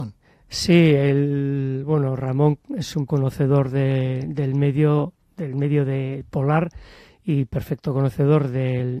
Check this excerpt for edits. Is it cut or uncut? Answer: cut